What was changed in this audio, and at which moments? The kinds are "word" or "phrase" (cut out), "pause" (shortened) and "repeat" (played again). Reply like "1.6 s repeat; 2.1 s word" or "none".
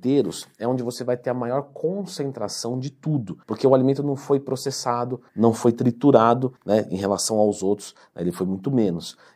3.4 s pause; 5.3 s pause; 6.6 s pause